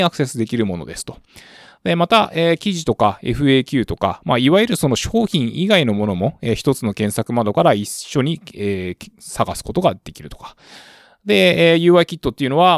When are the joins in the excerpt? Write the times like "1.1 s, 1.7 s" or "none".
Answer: none

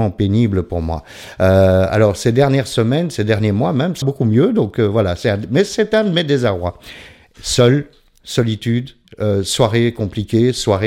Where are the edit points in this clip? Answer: 4.0 s

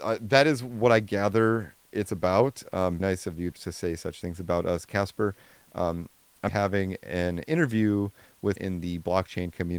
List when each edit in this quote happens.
3.0 s, 3.5 s, 4.2 s, 6.5 s, 8.6 s

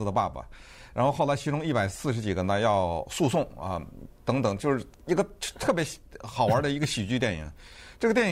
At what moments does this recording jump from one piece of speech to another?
none

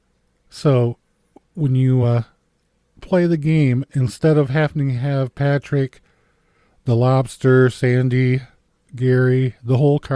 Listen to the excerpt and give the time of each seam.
none

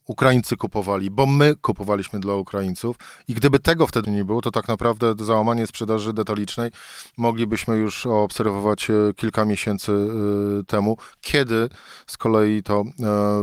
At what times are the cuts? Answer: 4.0 s

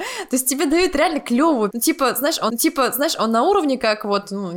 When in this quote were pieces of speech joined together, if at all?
1.7 s, 2.5 s

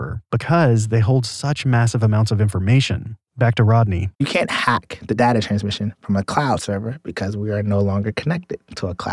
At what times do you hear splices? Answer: 3.2 s, 4.1 s

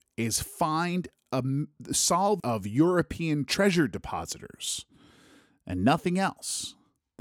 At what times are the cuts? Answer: 2.4 s

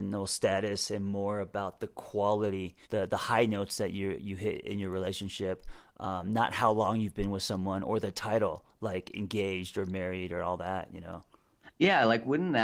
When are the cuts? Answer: 2.8 s

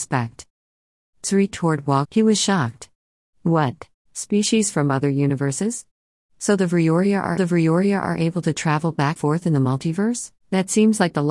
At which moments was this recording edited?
1.5 s, 2.0 s, 4.1 s, 7.4 s, 9.2 s, 10.4 s

